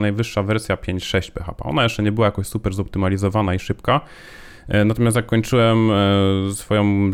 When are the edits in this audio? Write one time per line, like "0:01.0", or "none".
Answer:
none